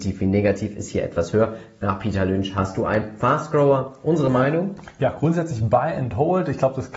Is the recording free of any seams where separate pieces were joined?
yes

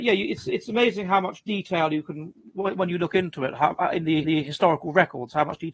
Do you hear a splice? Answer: yes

